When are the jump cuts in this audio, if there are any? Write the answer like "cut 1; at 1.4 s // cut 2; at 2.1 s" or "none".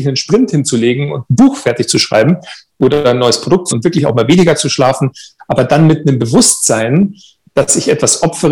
cut 1; at 3.7 s